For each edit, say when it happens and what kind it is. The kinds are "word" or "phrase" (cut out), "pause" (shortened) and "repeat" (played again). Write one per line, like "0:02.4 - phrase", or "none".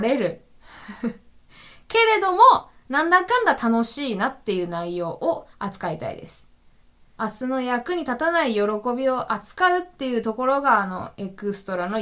0:05.5 - pause